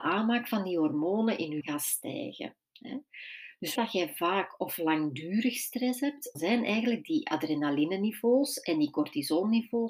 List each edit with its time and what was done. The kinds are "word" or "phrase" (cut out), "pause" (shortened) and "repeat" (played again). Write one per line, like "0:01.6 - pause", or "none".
0:01.6 - word
0:03.8 - word
0:06.3 - word